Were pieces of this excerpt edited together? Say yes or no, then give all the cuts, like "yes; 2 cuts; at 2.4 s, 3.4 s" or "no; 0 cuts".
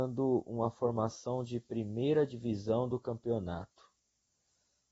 no; 0 cuts